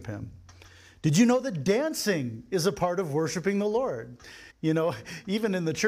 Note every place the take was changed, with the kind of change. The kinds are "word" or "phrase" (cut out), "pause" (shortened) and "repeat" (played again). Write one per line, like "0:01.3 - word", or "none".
0:04.5 - pause